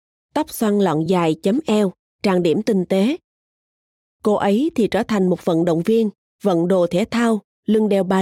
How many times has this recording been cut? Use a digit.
0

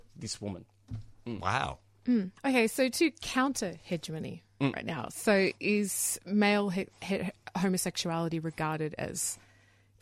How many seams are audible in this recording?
1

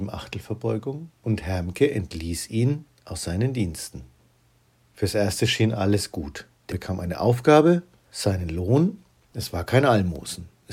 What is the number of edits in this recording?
2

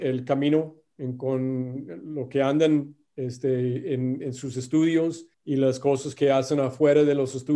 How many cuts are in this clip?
1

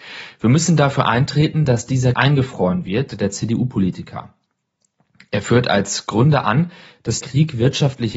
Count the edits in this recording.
3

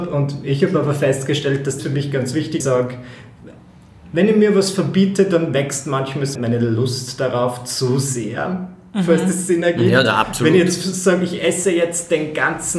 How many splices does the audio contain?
3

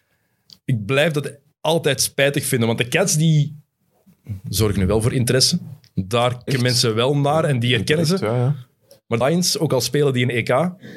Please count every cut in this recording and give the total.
2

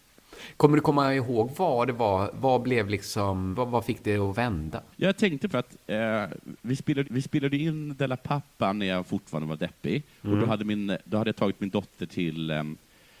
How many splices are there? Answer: 4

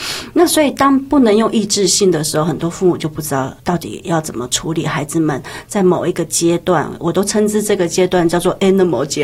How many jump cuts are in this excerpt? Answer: 1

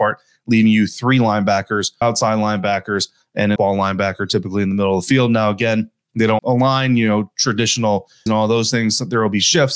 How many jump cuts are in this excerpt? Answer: 4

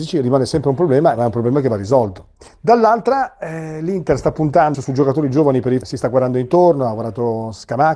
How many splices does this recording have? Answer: 3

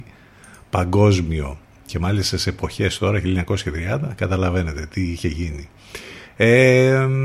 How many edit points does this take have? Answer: 0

